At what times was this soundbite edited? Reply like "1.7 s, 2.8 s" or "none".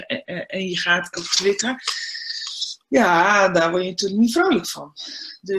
1.1 s